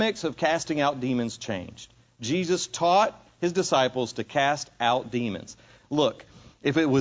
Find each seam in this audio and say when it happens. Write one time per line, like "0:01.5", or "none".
none